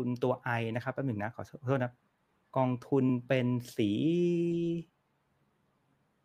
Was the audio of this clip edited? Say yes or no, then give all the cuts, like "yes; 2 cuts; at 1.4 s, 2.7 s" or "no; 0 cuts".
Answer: no; 0 cuts